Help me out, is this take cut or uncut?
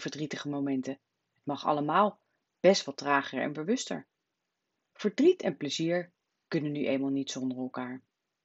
uncut